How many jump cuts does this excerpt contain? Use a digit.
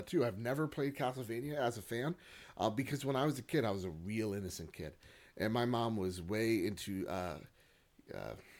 0